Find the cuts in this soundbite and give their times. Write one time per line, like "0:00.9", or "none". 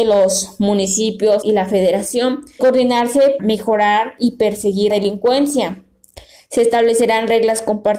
0:01.4
0:02.6
0:03.4
0:04.9